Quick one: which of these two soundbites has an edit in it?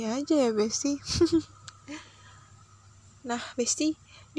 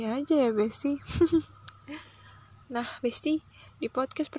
second; 1 cut; at 2.6 s

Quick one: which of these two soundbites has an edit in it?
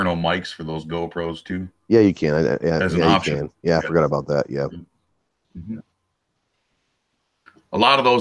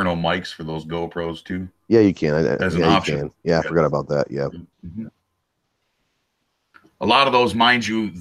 second; 2 cuts; at 2.6 s, 4.7 s

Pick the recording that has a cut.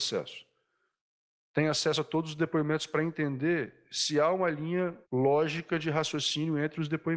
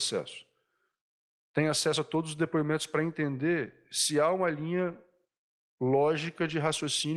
first; 1 cut; at 5.0 s

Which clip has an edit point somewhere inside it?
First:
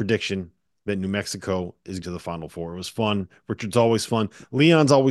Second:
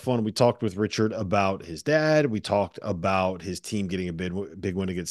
first; 1 cut; at 2.0 s

